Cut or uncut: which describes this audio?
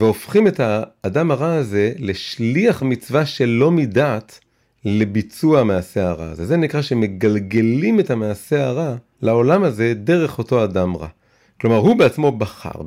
uncut